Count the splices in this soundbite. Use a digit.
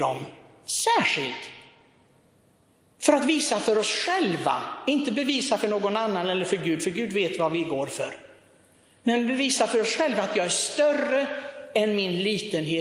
0